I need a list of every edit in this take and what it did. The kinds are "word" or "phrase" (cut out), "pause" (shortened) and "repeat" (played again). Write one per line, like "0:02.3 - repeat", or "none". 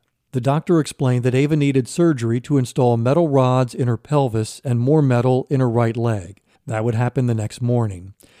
0:06.6 - pause